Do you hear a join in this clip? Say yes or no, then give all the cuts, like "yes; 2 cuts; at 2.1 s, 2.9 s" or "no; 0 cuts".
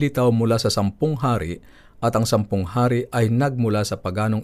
no; 0 cuts